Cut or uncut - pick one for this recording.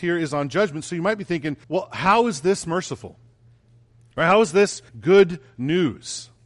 cut